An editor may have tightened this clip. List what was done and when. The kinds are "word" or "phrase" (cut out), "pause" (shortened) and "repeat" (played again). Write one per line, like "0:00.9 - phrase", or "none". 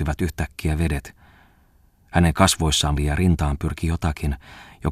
0:03.0 - word

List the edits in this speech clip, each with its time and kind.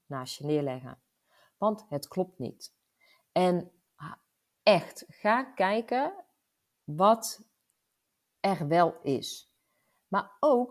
none

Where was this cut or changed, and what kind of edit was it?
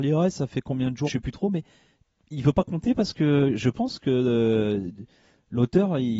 0:01.1 - word

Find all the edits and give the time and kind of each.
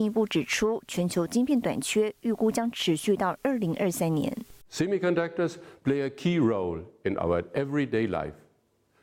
none

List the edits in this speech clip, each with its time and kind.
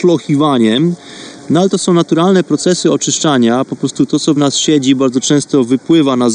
none

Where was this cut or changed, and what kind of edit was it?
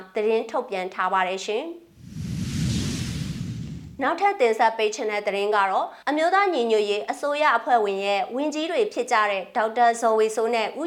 0:06.0 - pause

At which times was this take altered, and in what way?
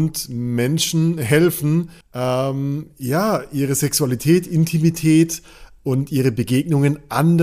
0:02.0 - pause

